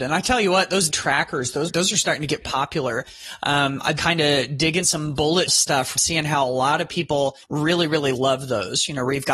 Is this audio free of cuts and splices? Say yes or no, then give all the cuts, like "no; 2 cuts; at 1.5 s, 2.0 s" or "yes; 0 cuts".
no; 8 cuts; at 0.9 s, 1.7 s, 2.4 s, 4.0 s, 4.8 s, 5.5 s, 6.0 s, 7.4 s